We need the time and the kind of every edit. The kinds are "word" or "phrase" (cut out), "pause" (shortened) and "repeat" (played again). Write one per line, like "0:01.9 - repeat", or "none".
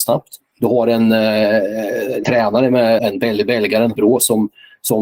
0:02.2 - word
0:03.0 - word
0:04.0 - word